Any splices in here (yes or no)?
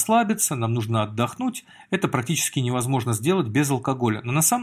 no